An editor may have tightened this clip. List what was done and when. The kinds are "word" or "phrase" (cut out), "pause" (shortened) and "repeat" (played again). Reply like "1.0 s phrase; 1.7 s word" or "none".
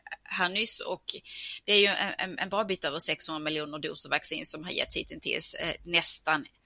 none